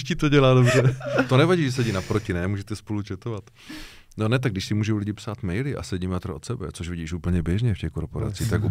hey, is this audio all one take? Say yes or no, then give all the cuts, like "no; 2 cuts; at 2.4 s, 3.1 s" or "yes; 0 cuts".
yes; 0 cuts